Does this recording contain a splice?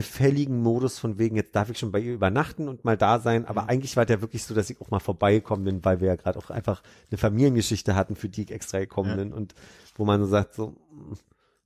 no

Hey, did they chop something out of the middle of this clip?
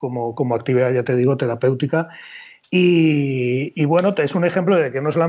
no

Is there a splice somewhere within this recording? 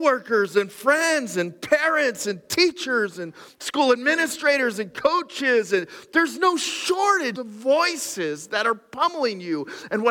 yes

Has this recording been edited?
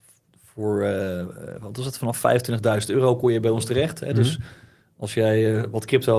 no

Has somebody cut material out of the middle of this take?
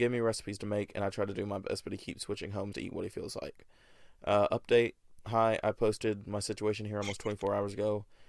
yes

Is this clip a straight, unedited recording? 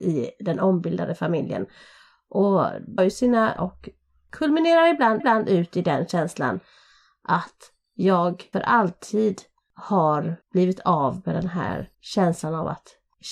no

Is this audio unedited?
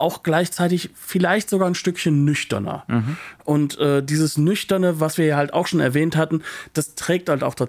yes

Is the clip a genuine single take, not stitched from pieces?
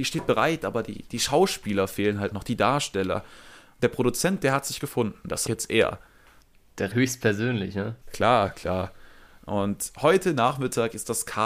no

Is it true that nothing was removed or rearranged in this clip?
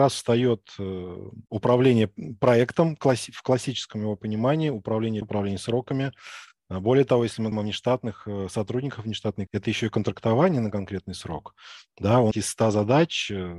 no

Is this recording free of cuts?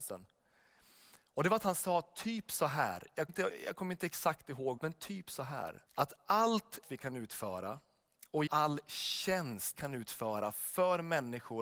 no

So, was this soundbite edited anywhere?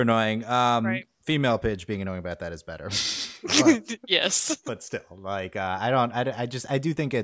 no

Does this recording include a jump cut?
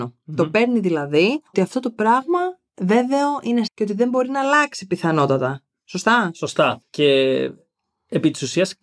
yes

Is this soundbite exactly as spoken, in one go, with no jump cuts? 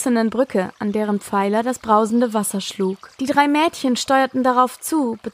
no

